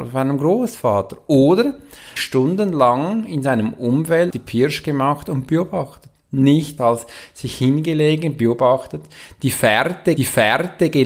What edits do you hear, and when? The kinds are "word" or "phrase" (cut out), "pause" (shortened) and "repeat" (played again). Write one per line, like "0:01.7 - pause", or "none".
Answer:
0:02.2 - phrase
0:04.3 - word
0:06.8 - word
0:10.2 - repeat